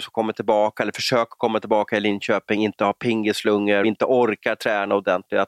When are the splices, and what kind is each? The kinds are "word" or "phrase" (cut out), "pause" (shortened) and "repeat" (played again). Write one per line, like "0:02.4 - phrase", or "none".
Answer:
0:03.8 - word